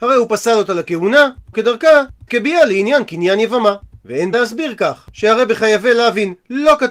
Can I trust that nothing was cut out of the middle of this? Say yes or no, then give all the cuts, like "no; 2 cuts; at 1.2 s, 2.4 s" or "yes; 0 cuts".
no; 3 cuts; at 1.5 s, 2.3 s, 4.3 s